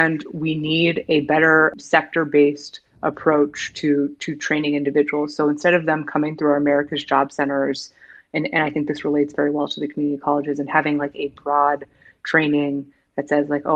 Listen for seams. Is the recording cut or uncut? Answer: uncut